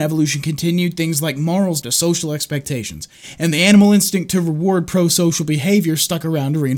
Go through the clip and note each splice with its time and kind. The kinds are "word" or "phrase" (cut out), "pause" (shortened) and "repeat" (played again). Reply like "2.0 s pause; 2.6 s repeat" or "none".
1.8 s word